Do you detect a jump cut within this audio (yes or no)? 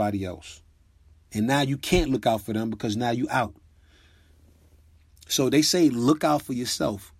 no